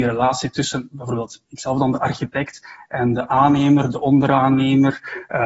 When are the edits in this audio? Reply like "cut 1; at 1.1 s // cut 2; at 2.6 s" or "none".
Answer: none